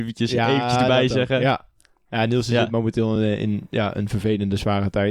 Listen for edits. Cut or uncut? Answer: uncut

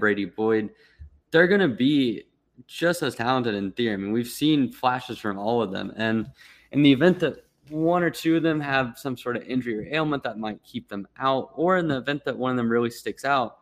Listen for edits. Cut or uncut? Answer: uncut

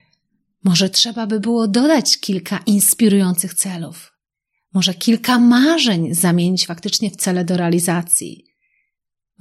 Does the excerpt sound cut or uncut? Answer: uncut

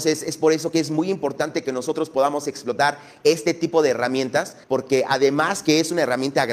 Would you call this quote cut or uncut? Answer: cut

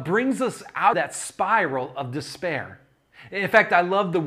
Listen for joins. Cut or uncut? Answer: cut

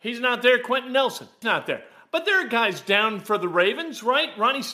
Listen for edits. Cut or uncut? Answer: cut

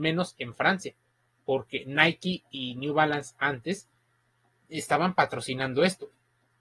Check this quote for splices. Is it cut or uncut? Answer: uncut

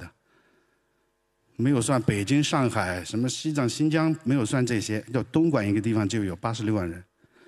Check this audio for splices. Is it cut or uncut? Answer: uncut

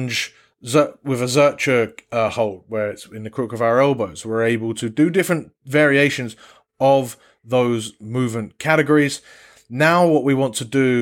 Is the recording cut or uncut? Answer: uncut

